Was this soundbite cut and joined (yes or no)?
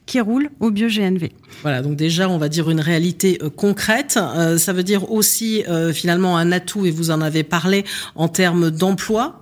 no